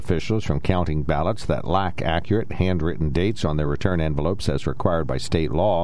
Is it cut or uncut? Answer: uncut